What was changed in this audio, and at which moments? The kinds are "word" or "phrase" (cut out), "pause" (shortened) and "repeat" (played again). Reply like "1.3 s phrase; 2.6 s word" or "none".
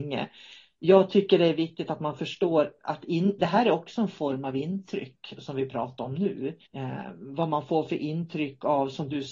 2.8 s pause; 6.7 s pause